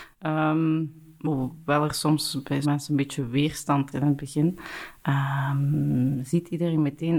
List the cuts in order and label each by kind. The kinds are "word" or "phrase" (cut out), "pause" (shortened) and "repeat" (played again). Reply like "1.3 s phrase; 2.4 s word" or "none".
1.2 s word; 2.6 s word; 3.9 s word

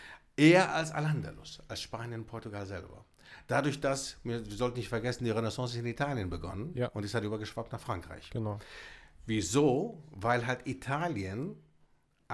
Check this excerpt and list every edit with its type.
none

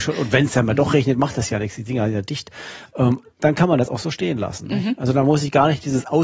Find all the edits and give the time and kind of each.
3.3 s pause

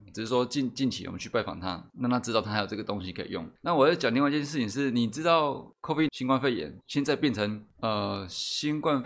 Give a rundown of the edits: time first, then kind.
6.1 s word

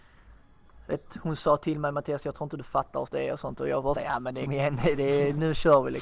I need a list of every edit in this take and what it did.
3.1 s word; 3.9 s word; 4.5 s word

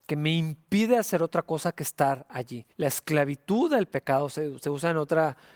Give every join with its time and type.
2.7 s pause

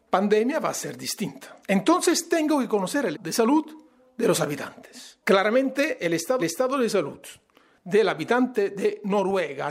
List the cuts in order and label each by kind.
1.6 s pause; 3.1 s word; 5.2 s pause; 6.4 s repeat

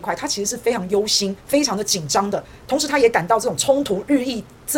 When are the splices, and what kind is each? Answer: 1.4 s pause

